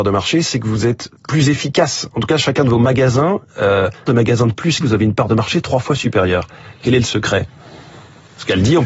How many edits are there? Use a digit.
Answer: 3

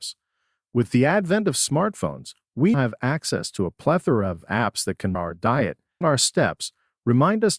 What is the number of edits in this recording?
3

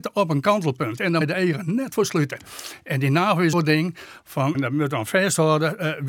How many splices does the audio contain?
3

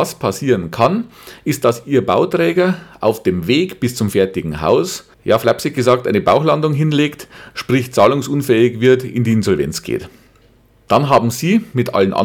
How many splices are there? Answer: 1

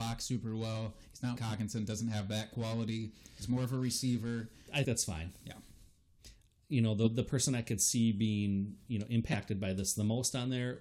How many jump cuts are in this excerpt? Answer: 2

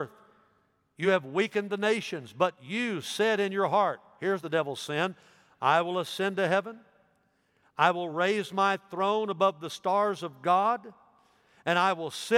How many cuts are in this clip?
0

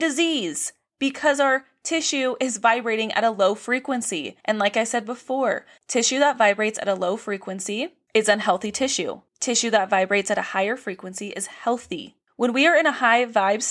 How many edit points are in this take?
2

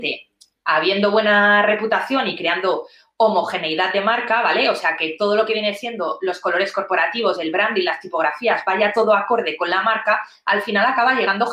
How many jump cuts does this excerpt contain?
0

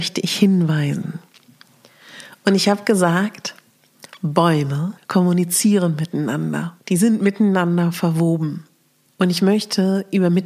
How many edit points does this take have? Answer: 3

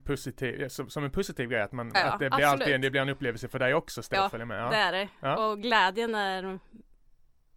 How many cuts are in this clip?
2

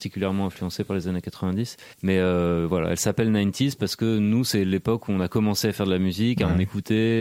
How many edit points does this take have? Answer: 1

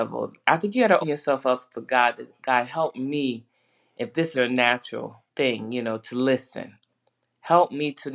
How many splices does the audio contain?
3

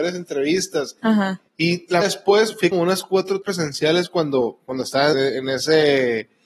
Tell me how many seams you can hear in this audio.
4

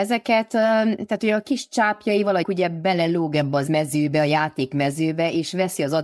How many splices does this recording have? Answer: 2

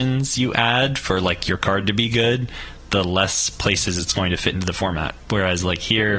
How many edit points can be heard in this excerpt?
0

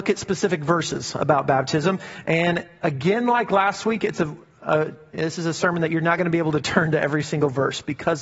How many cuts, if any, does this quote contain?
0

